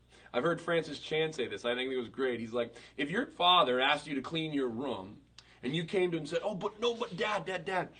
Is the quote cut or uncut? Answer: uncut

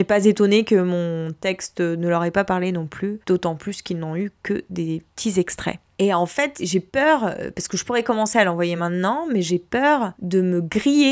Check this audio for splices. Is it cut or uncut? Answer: uncut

